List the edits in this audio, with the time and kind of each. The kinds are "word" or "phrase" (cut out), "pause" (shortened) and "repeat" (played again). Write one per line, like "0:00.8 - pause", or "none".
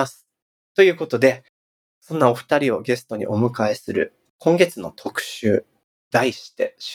none